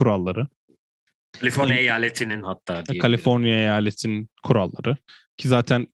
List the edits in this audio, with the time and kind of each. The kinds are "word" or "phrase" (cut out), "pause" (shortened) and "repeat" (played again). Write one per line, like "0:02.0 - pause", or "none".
0:04.4 - pause